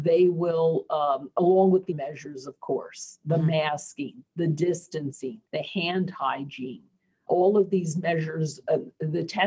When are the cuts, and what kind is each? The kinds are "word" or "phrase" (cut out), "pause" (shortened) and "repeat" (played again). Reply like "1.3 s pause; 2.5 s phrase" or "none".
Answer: 1.9 s word; 4.3 s pause; 5.5 s pause; 7.3 s word